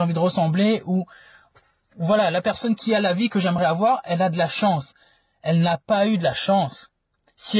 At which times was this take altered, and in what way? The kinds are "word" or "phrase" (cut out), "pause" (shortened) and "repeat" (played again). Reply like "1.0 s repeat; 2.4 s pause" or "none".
none